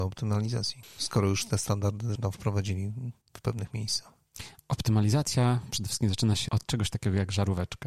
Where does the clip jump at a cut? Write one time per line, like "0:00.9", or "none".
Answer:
0:02.1
0:03.2
0:06.5